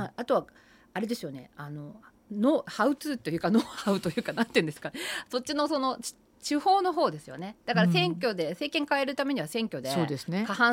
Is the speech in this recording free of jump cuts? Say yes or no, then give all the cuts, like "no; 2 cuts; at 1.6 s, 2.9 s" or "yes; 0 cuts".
yes; 0 cuts